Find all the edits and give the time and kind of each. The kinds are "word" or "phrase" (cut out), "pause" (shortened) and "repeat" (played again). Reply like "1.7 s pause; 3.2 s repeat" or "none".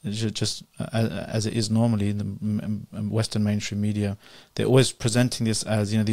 none